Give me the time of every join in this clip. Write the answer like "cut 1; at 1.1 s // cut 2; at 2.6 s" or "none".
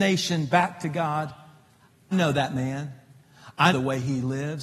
cut 1; at 2.1 s // cut 2; at 3.7 s